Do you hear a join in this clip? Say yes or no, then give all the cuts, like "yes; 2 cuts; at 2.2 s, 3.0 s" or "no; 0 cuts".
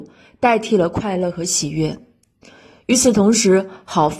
no; 0 cuts